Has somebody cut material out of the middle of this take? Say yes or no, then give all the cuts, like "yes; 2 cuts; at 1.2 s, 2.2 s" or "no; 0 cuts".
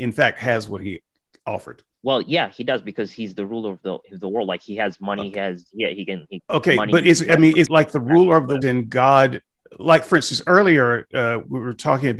yes; 5 cuts; at 1.9 s, 6.4 s, 7.7 s, 8.6 s, 9.5 s